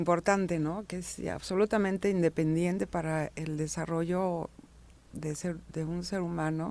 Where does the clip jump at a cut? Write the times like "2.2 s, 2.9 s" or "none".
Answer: none

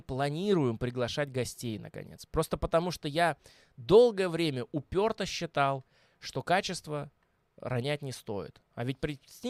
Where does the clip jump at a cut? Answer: none

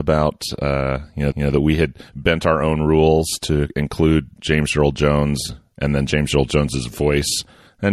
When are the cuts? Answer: 1.3 s

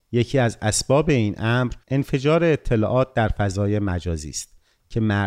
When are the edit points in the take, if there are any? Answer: 1.8 s

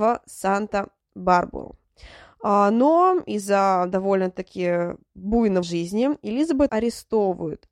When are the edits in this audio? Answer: 5.6 s, 6.7 s

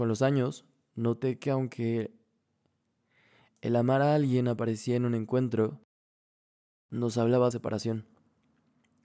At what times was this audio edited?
7.5 s

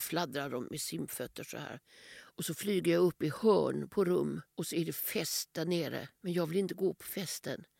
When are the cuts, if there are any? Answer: 4.5 s, 6.1 s

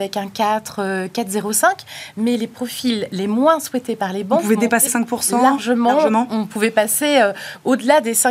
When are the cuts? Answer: 4.9 s

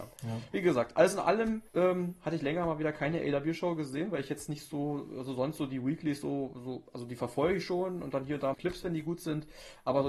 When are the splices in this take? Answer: 1.7 s, 8.5 s

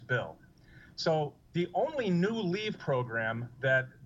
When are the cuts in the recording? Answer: 1.4 s

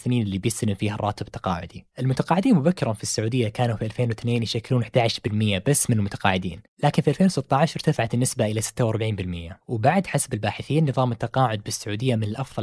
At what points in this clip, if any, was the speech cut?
1.9 s, 6.7 s, 9.6 s

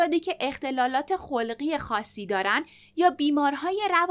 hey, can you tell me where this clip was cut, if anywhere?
none

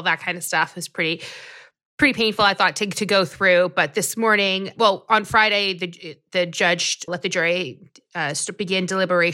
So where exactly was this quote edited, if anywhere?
7.1 s

